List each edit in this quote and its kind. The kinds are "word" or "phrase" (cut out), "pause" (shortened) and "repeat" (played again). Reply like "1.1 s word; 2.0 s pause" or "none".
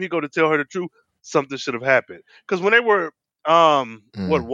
none